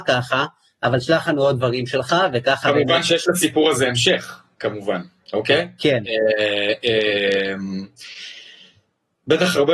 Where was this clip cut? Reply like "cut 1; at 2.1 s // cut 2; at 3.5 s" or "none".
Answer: none

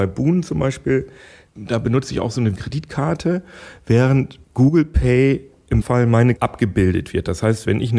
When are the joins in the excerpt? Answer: cut 1; at 2.6 s // cut 2; at 4.4 s // cut 3; at 5.8 s // cut 4; at 6.4 s

